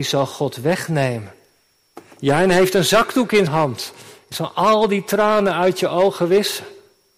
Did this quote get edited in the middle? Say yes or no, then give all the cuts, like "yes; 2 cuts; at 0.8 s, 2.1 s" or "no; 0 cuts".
yes; 1 cut; at 3.5 s